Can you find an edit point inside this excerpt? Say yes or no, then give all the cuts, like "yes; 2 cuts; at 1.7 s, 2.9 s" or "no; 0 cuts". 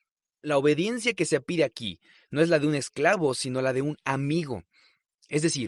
no; 0 cuts